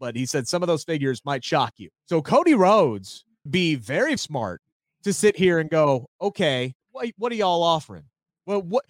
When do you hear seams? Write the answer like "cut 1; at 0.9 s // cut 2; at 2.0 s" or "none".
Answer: cut 1; at 2.0 s // cut 2; at 3.5 s // cut 3; at 4.2 s // cut 4; at 6.8 s